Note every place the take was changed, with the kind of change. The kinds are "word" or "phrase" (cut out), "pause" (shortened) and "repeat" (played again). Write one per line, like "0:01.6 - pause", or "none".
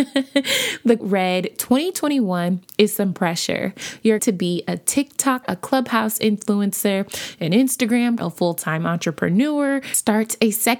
0:01.0 - word
0:04.2 - word
0:05.4 - word
0:08.2 - phrase